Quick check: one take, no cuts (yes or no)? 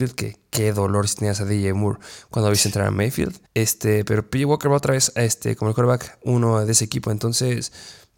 no